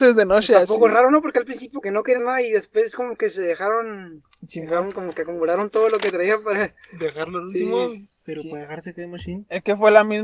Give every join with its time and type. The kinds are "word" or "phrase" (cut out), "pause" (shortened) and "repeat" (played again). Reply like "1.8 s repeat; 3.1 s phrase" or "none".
1.8 s word; 2.2 s word